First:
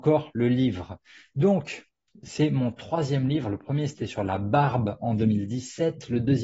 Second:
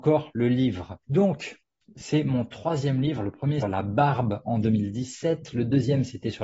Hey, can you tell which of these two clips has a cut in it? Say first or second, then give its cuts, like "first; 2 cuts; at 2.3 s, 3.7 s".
second; 2 cuts; at 1.0 s, 3.6 s